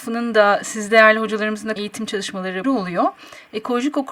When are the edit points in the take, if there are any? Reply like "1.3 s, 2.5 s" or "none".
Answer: 1.8 s, 2.6 s